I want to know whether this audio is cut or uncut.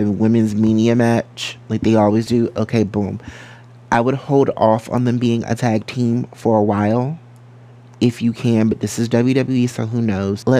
uncut